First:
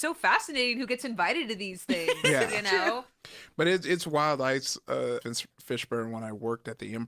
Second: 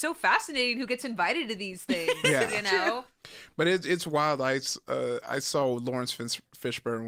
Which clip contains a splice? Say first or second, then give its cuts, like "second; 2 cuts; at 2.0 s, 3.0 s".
first; 1 cut; at 5.2 s